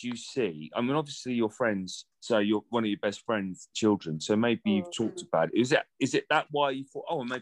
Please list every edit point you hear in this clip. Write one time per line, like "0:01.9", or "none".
0:02.1
0:03.7